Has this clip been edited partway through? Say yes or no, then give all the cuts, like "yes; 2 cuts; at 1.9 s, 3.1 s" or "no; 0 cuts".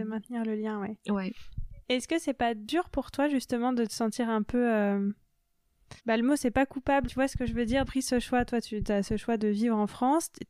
yes; 3 cuts; at 6.0 s, 7.1 s, 7.8 s